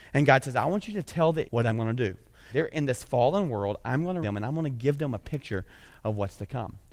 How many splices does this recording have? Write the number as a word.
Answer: three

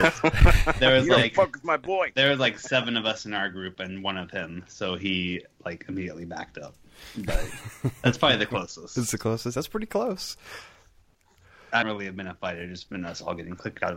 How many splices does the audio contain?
one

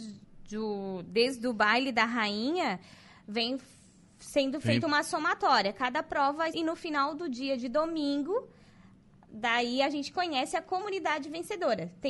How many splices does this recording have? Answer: one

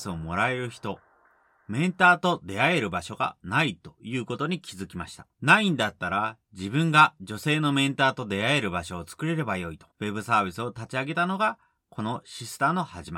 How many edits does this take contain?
two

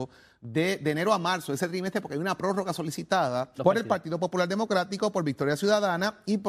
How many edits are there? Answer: one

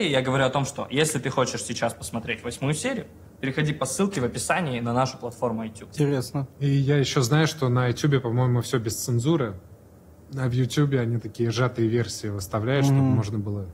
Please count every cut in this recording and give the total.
zero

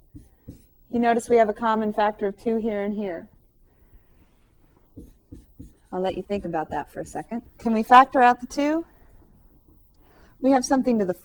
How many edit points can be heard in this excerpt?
two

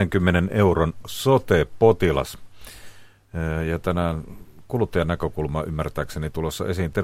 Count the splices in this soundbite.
zero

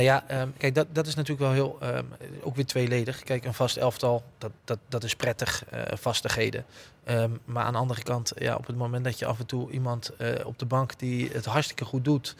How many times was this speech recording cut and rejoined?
one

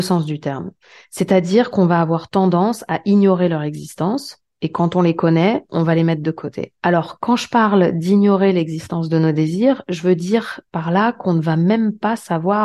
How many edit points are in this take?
one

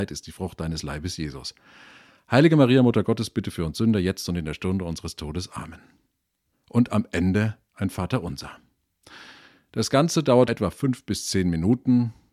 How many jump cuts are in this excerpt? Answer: one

